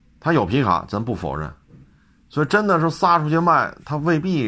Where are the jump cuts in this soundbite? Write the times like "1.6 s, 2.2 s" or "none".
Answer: none